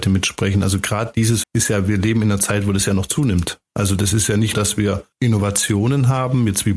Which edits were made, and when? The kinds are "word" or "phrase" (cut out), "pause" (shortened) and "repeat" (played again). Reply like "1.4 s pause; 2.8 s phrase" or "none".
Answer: 1.4 s word; 4.5 s word; 5.1 s pause